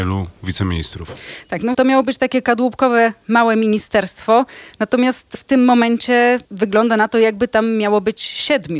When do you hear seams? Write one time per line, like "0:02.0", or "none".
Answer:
0:01.7